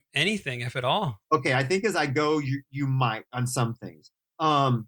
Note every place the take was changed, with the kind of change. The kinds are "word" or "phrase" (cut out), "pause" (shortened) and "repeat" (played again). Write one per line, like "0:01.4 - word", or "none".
0:01.2 - pause